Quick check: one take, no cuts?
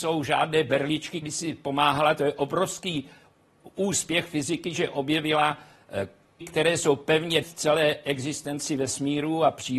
no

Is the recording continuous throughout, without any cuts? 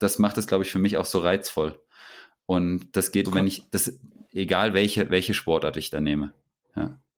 no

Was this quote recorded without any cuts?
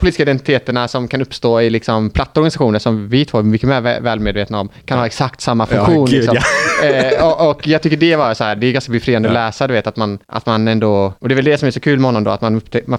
no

